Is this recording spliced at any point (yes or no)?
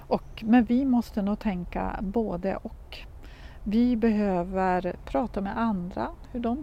no